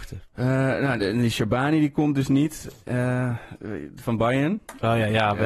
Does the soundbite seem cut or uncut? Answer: uncut